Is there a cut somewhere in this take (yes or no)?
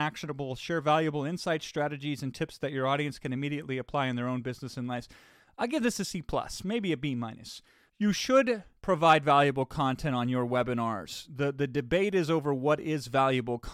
no